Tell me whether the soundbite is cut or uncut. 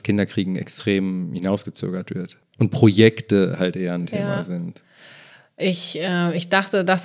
uncut